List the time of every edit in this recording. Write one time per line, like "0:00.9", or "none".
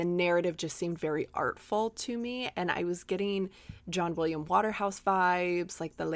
none